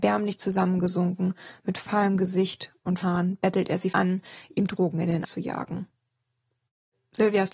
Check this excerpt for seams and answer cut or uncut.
cut